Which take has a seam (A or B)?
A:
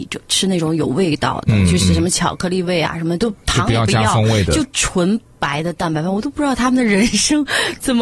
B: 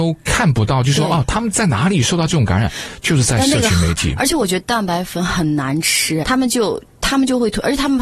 B